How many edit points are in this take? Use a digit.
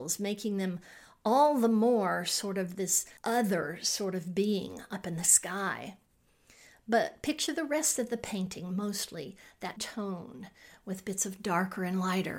2